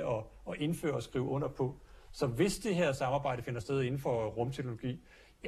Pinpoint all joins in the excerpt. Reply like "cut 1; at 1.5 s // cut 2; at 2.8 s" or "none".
none